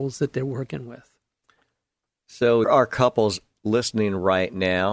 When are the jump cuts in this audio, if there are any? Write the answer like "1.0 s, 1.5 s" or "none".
2.6 s